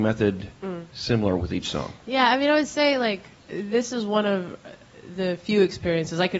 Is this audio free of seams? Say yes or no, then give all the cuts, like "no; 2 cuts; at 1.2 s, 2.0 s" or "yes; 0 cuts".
no; 1 cut; at 3.4 s